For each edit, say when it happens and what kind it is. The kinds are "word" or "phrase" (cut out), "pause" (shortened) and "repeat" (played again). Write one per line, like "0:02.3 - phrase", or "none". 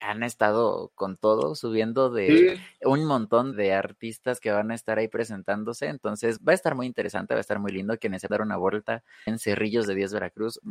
0:03.5 - word
0:06.4 - word
0:08.3 - word
0:09.3 - word